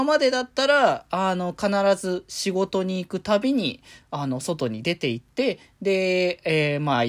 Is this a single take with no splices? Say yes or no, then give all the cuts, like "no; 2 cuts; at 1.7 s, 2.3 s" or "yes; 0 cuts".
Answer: yes; 0 cuts